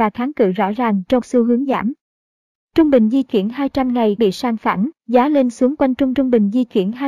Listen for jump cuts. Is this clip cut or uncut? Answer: cut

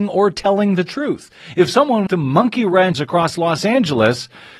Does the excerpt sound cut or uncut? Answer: cut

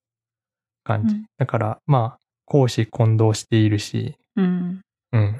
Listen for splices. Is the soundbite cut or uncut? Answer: cut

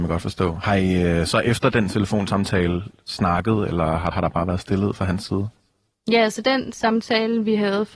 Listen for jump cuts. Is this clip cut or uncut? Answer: cut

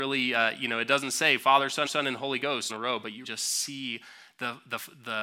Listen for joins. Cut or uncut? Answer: cut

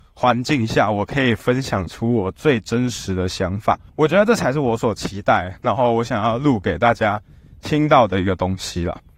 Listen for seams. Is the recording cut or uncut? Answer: cut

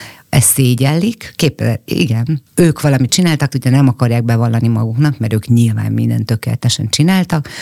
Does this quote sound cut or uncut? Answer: cut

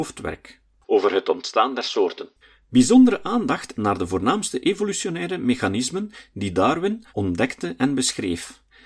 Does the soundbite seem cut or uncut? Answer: cut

